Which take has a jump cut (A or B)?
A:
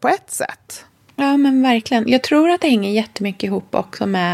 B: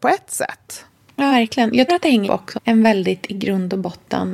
B